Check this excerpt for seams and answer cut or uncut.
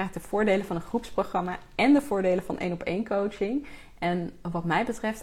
uncut